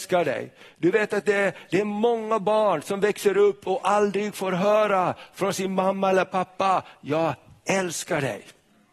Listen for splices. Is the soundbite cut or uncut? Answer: uncut